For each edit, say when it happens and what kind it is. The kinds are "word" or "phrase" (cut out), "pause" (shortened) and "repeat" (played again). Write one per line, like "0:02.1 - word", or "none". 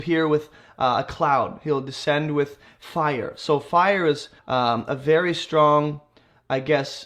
0:04.4 - pause